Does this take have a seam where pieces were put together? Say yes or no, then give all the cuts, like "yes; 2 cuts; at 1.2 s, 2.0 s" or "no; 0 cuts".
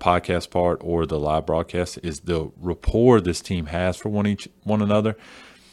no; 0 cuts